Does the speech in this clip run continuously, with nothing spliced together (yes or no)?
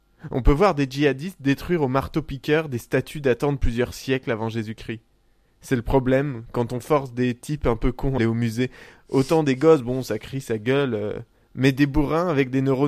no